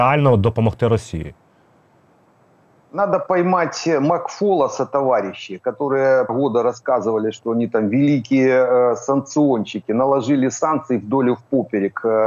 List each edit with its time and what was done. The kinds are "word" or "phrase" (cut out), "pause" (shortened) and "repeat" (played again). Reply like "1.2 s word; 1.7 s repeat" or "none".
6.3 s word